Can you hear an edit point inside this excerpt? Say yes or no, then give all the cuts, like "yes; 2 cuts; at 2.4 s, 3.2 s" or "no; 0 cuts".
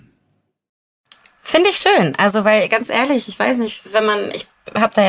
no; 0 cuts